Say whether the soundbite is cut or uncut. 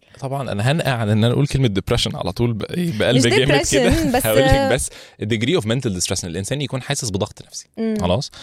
uncut